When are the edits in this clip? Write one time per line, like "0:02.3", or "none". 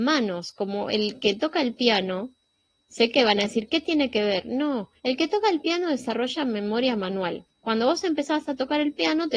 0:05.0
0:07.5